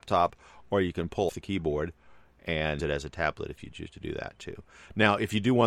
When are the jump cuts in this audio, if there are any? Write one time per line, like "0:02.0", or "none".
0:01.3
0:02.8